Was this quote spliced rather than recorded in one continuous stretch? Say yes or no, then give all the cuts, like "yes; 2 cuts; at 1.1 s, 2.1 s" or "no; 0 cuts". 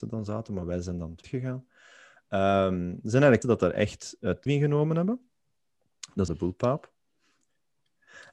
yes; 4 cuts; at 1.2 s, 3.4 s, 4.5 s, 6.3 s